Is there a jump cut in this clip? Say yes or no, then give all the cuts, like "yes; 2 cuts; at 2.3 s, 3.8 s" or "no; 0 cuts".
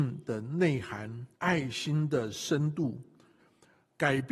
yes; 1 cut; at 1.3 s